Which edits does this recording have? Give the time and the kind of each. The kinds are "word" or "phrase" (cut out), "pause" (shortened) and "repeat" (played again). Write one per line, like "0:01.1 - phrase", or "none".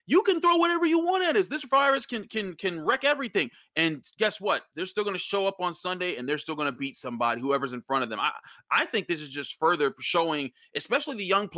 none